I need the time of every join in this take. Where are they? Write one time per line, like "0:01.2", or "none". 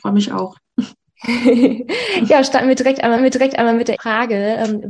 0:03.2
0:04.0